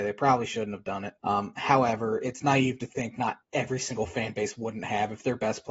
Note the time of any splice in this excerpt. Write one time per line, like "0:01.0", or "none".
0:01.2
0:03.4

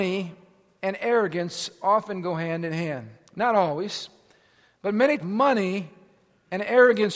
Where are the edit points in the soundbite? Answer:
0:05.2

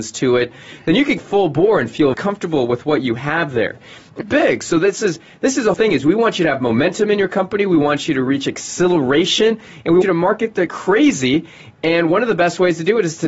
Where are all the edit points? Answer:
0:01.2
0:02.1
0:04.2
0:05.7
0:10.0
0:10.7

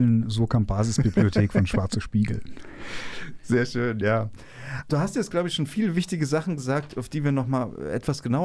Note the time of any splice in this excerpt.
none

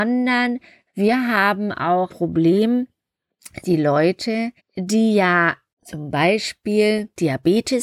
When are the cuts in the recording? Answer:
0:02.1
0:03.6
0:04.6

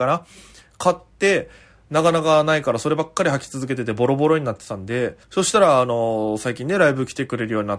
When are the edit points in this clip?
0:05.2

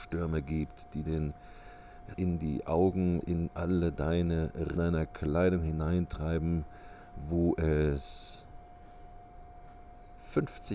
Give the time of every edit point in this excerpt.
0:01.0
0:02.1
0:03.2
0:04.8

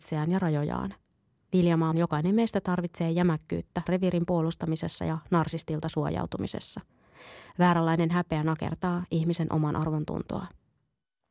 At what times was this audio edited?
0:01.9
0:03.9

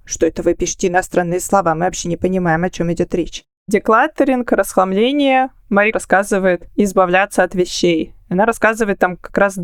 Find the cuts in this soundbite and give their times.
0:05.9
0:06.7

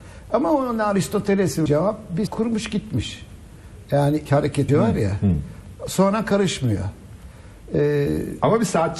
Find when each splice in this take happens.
0:01.7
0:02.3
0:04.3
0:04.7

